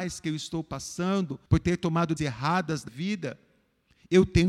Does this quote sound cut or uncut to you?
cut